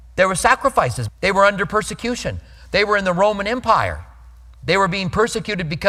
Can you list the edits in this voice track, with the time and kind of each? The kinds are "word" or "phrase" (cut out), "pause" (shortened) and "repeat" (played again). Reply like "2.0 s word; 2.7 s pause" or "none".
1.1 s word